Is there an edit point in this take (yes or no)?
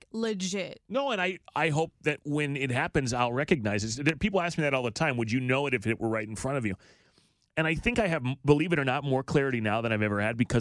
no